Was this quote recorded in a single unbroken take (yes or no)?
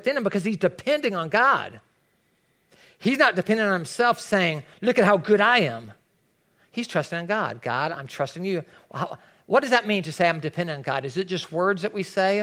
yes